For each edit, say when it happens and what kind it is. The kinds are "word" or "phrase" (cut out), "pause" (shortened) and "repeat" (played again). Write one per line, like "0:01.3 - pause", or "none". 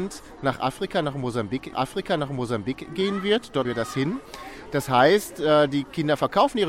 0:01.7 - repeat
0:03.6 - word